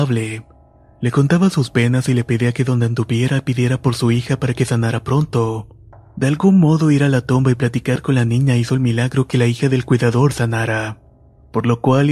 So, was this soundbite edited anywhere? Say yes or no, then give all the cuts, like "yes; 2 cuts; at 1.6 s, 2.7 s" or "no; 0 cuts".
no; 0 cuts